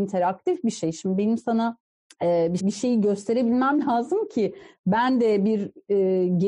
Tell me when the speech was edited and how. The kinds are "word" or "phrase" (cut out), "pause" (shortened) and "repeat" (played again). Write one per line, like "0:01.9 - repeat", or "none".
0:02.0 - pause
0:02.6 - phrase